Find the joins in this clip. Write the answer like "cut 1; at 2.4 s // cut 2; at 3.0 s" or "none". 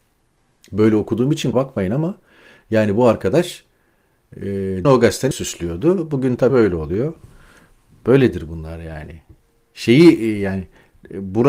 cut 1; at 1.5 s // cut 2; at 4.8 s // cut 3; at 5.3 s // cut 4; at 6.5 s